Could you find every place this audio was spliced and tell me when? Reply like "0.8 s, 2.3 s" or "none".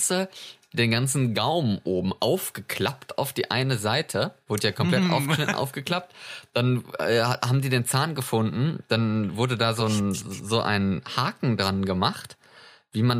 none